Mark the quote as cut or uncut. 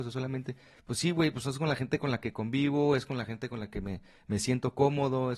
uncut